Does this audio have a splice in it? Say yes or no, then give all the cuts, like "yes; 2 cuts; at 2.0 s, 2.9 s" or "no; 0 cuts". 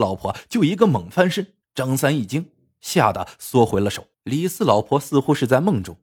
yes; 2 cuts; at 1.6 s, 4.1 s